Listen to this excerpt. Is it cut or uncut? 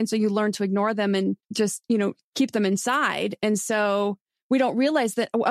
cut